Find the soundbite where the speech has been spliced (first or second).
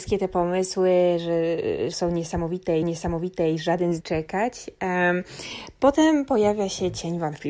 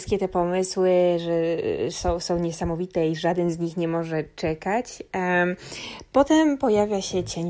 first